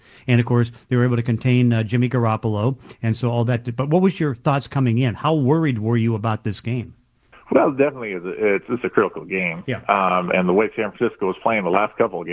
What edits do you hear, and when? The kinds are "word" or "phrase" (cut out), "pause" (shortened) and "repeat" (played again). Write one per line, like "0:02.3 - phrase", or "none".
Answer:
0:07.3 - pause